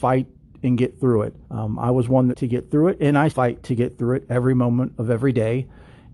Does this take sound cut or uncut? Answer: cut